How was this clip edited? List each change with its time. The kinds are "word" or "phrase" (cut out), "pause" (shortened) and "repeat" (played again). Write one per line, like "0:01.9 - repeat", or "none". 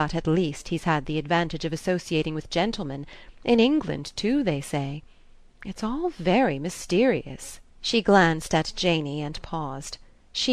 0:07.7 - pause

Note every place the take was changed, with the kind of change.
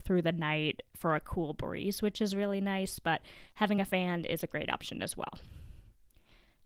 none

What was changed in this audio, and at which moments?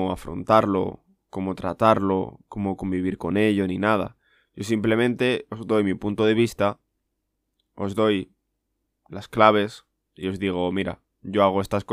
none

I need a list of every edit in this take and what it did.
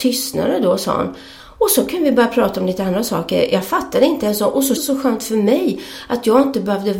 0:04.8 - word

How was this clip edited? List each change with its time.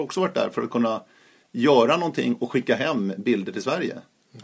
none

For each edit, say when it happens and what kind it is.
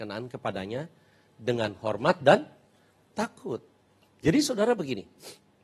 none

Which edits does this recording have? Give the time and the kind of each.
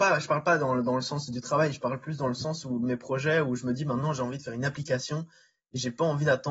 none

